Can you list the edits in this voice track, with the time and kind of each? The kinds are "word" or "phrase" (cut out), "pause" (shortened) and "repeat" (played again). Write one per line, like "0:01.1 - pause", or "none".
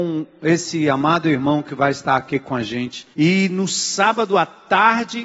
0:03.1 - pause